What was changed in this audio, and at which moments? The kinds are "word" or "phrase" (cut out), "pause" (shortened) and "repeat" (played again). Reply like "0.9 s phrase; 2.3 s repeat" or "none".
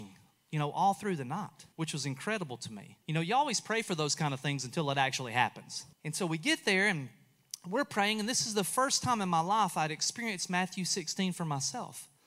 1.7 s pause; 3.0 s pause; 5.9 s pause